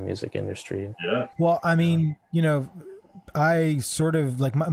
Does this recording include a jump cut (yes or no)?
yes